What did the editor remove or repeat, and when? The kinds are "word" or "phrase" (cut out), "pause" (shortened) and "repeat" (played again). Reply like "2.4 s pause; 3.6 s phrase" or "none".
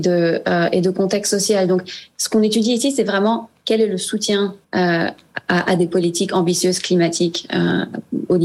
4.6 s pause